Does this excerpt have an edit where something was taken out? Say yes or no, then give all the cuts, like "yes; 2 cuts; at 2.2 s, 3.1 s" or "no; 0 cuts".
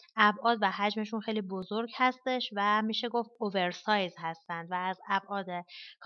no; 0 cuts